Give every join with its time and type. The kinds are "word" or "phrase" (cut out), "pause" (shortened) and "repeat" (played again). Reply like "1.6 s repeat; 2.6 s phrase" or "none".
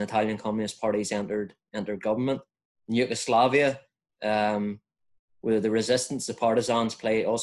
none